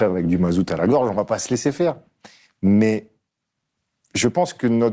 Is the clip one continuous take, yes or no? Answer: yes